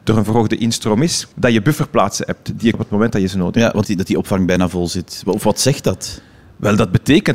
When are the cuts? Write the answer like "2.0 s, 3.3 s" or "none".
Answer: 1.3 s, 2.7 s, 3.8 s